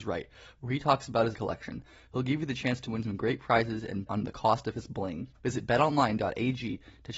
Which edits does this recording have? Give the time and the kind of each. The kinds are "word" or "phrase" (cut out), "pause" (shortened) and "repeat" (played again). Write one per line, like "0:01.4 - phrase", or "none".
0:01.3 - phrase
0:04.1 - word
0:05.3 - pause